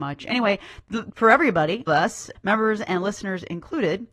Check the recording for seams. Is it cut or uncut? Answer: cut